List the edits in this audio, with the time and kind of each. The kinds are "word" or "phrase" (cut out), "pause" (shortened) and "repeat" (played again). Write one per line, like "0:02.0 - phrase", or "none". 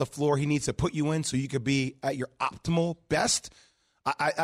none